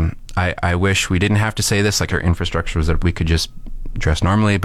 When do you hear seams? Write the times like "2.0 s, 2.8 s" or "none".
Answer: 2.1 s, 3.0 s